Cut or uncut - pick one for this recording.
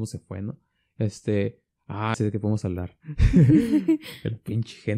cut